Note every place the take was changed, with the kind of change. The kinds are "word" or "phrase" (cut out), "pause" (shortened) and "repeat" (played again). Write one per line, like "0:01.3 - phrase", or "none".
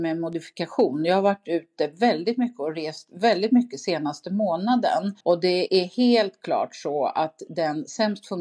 0:05.2 - pause